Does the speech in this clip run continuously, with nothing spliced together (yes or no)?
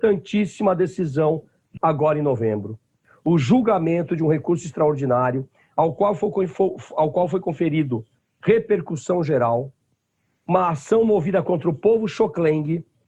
no